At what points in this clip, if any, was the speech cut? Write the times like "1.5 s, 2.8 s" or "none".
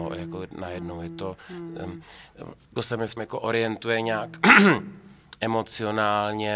2.8 s, 3.2 s